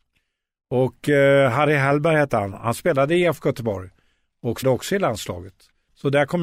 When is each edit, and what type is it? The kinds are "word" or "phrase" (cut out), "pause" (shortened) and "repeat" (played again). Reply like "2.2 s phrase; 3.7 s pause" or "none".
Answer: 4.6 s word